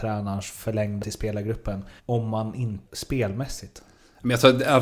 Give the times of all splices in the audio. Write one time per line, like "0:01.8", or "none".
0:01.0
0:02.0
0:02.9